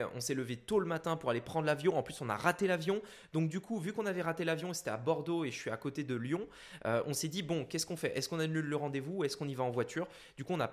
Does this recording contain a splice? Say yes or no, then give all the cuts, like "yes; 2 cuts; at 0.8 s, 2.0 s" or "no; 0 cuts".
no; 0 cuts